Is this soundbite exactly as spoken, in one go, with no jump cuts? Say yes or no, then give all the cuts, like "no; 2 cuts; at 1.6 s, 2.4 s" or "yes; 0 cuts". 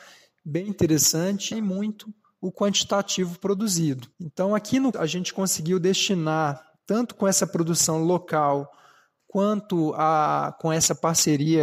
no; 4 cuts; at 1.5 s, 4.1 s, 4.9 s, 6.8 s